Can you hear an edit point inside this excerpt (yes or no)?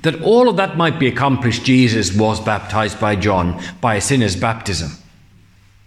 no